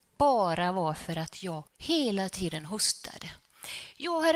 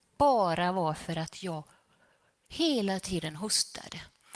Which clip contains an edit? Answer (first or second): first